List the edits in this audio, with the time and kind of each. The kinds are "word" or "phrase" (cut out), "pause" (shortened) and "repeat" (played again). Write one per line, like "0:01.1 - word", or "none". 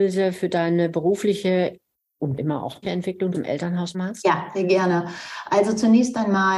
0:02.4 - word
0:02.8 - word
0:03.3 - word
0:03.9 - word